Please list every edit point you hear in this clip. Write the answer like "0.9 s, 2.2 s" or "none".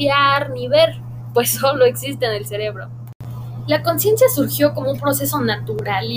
none